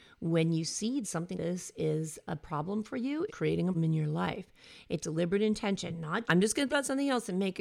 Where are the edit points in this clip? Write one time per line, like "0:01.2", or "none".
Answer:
0:01.0
0:01.3
0:03.3
0:03.7
0:05.0
0:06.2
0:06.7

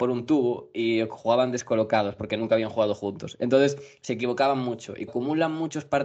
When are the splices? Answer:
0:05.1

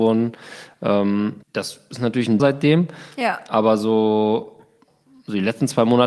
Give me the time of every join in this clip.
0:01.4
0:02.4

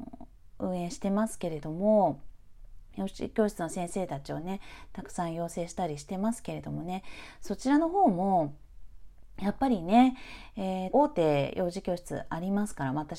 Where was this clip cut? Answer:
0:10.9

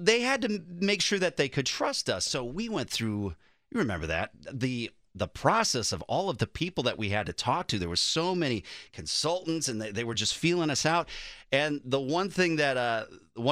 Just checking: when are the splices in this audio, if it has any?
none

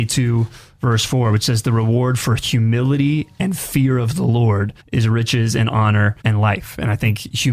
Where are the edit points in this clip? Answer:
0:04.8
0:06.2

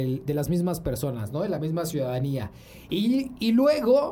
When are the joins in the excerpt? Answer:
none

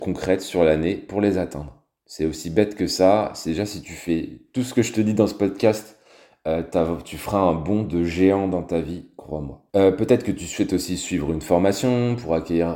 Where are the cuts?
0:09.7

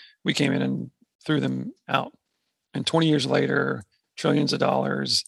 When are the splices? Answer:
none

